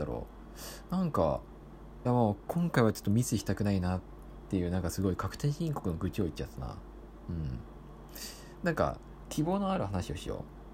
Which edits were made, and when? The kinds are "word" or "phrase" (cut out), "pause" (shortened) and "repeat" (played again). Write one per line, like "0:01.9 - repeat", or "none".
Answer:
0:02.1 - phrase